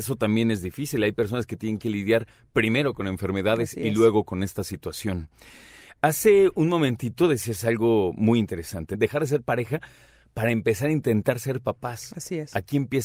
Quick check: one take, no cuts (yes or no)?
yes